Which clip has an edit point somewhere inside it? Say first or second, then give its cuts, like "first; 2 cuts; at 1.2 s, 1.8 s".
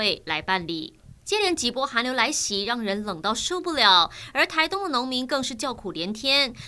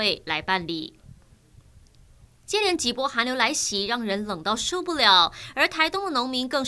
first; 1 cut; at 1.2 s